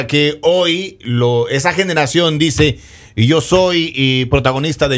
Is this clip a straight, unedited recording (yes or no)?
yes